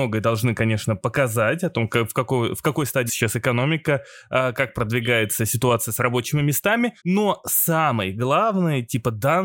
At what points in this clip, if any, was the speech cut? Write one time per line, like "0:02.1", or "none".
0:03.1
0:07.0